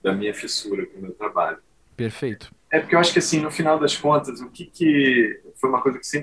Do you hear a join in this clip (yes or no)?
no